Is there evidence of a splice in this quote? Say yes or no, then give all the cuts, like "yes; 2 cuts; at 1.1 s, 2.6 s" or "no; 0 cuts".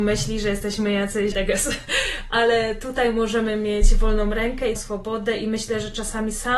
yes; 2 cuts; at 1.3 s, 4.8 s